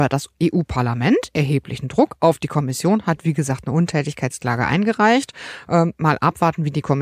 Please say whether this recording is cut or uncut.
uncut